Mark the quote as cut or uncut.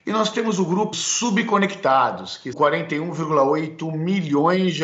cut